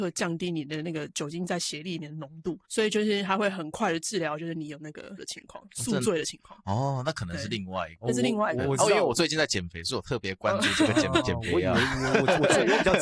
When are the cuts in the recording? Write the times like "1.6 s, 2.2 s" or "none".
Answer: 2.6 s, 5.2 s